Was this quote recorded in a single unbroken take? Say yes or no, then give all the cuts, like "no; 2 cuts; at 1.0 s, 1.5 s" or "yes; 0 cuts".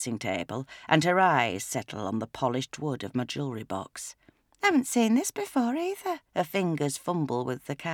no; 2 cuts; at 4.4 s, 6.3 s